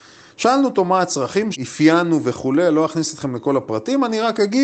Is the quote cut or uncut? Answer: cut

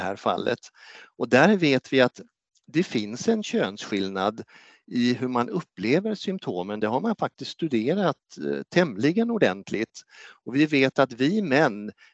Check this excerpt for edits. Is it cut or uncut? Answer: uncut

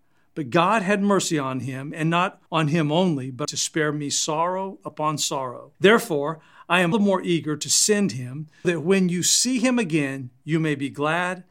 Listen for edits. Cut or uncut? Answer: cut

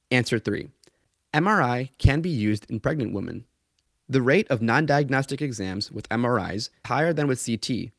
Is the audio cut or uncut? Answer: cut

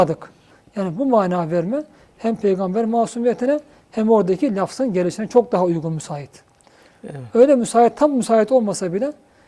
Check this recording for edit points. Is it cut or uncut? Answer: uncut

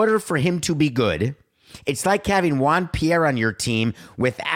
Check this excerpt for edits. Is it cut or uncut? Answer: uncut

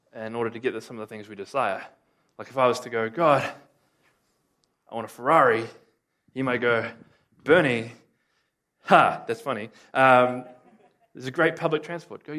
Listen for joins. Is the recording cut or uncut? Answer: uncut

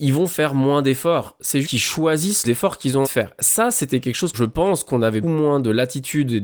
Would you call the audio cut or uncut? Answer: cut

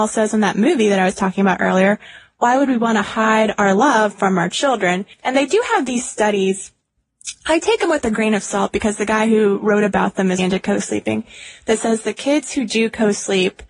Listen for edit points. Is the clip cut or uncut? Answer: cut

